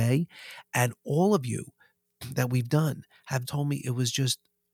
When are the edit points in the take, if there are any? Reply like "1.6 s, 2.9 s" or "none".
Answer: 3.4 s

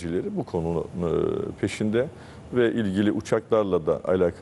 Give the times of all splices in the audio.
none

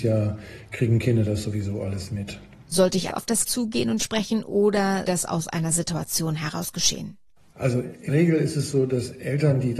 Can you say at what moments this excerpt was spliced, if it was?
3.1 s, 3.4 s, 4.0 s, 5.0 s, 8.1 s

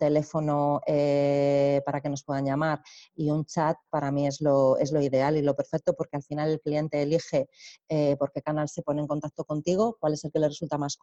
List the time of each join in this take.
none

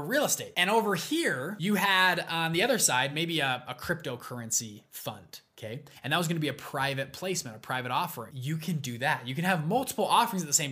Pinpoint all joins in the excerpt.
none

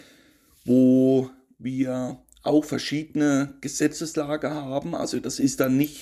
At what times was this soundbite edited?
none

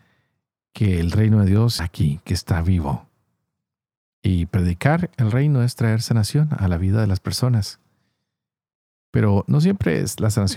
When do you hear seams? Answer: 1.8 s

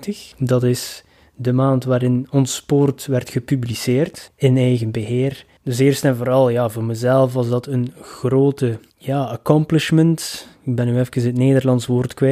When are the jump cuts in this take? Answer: none

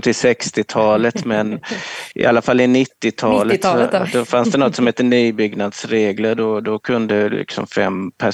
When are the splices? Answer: 2.1 s

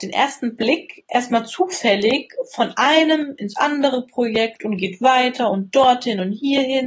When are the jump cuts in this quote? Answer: none

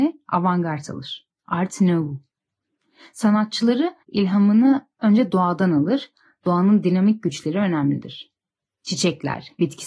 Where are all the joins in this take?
1.4 s, 4.0 s

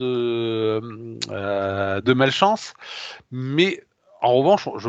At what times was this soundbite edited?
none

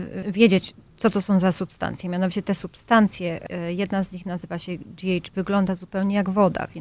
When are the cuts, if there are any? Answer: 5.3 s

